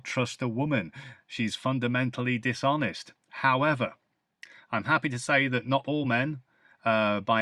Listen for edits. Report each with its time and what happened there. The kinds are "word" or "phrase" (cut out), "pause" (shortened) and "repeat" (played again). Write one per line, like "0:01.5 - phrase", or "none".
none